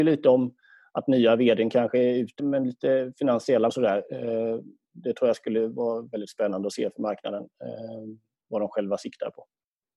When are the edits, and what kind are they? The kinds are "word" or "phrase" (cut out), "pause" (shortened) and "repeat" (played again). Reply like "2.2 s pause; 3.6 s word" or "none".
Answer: 2.4 s word; 3.7 s word